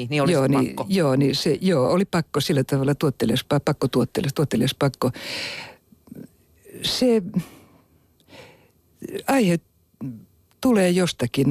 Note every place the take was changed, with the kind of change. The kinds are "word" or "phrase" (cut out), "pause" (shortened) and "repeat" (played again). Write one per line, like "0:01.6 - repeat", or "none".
none